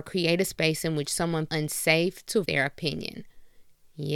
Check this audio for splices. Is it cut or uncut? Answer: cut